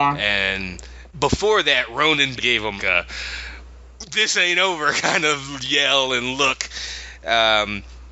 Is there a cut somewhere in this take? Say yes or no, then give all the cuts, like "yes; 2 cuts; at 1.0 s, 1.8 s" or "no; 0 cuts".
yes; 3 cuts; at 1.1 s, 2.4 s, 2.8 s